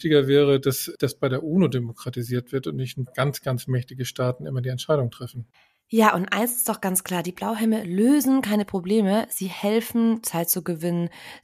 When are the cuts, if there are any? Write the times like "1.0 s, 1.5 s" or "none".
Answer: 3.1 s, 5.5 s